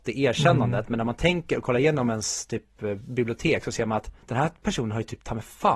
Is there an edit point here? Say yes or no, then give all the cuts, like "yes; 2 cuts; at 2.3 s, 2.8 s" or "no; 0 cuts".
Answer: yes; 1 cut; at 4.2 s